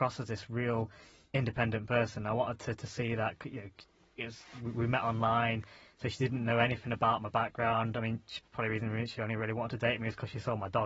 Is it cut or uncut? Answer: uncut